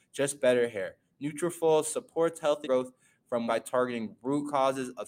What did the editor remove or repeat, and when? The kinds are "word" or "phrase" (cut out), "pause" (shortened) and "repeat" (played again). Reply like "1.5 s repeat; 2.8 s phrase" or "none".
2.6 s word; 3.5 s word